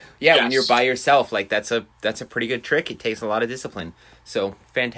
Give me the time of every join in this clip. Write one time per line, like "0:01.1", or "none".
none